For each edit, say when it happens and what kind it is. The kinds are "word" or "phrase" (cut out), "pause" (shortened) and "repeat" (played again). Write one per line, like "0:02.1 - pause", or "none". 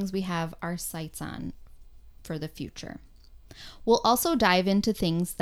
none